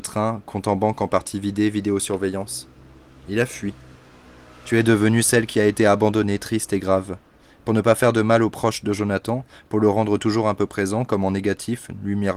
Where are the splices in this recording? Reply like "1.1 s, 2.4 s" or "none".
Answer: none